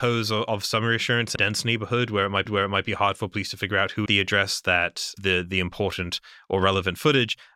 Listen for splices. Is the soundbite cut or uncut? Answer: cut